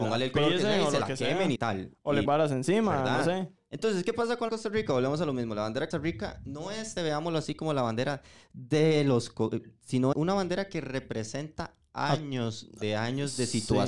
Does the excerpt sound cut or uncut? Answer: cut